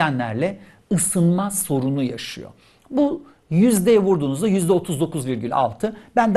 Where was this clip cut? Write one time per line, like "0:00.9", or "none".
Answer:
none